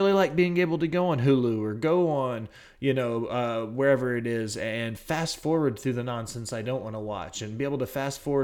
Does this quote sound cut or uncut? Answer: uncut